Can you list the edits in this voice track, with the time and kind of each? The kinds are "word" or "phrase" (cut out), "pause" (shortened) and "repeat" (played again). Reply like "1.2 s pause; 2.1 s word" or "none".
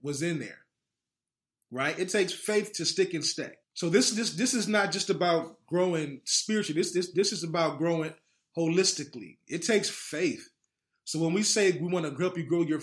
3.6 s pause